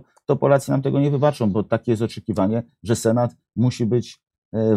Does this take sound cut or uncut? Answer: uncut